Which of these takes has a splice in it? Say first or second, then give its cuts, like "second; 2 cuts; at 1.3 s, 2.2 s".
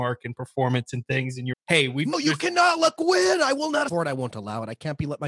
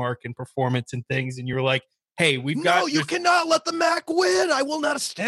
first; 4 cuts; at 1.5 s, 2.1 s, 3.0 s, 3.9 s